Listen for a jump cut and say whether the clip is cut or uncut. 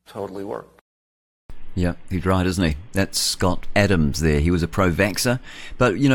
uncut